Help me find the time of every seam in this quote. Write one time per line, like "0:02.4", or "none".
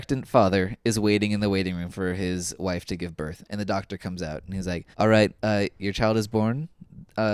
0:04.9
0:05.4